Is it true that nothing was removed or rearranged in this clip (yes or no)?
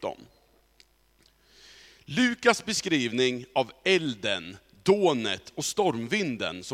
yes